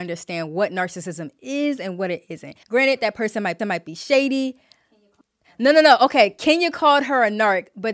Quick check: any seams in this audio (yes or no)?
yes